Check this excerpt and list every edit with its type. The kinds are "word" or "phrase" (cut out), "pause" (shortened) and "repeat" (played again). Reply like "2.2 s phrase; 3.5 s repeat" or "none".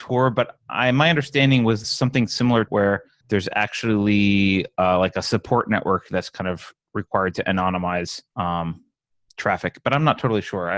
1.8 s phrase; 2.7 s word; 3.2 s word; 8.3 s pause